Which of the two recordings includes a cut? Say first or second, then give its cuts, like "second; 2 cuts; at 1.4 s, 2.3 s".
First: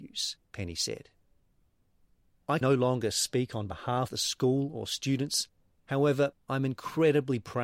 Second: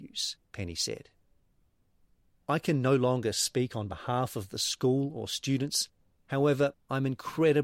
first; 2 cuts; at 2.6 s, 4.1 s